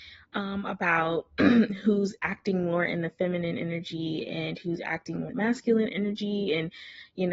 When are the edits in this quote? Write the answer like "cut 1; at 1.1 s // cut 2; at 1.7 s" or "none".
cut 1; at 2.2 s // cut 2; at 5.3 s